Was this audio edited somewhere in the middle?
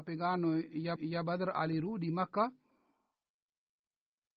yes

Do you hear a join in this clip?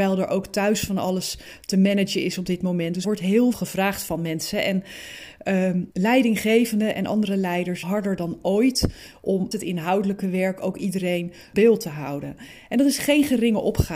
yes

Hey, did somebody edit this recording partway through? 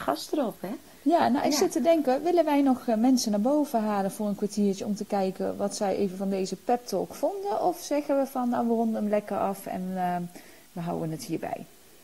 no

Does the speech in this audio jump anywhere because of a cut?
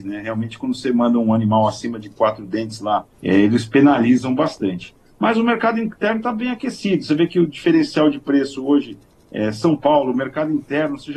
yes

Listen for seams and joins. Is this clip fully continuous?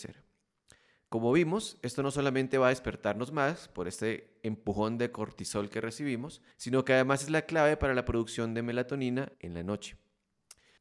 no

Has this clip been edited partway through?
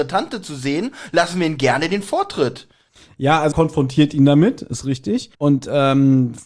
yes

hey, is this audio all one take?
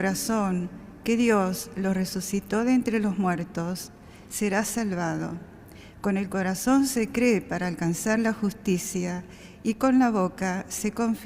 yes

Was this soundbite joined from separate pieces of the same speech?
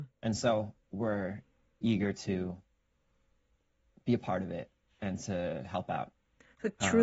no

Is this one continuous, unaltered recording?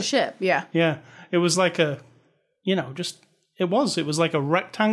yes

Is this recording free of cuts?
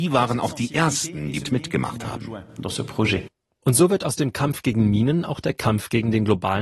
no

